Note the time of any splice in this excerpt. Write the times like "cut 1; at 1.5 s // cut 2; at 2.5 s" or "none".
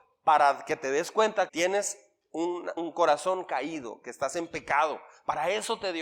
cut 1; at 1.5 s // cut 2; at 2.8 s